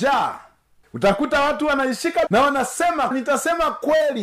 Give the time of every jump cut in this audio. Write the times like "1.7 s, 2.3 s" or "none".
2.3 s, 3.1 s